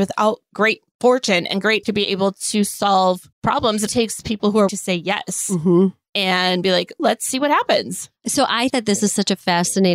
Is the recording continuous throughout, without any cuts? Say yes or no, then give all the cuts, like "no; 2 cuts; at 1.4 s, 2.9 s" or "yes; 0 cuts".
no; 8 cuts; at 0.9 s, 1.8 s, 3.3 s, 3.9 s, 4.7 s, 7.0 s, 8.2 s, 8.7 s